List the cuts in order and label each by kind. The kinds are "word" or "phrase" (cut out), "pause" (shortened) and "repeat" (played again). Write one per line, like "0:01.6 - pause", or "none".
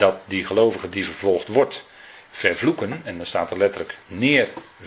0:02.3 - word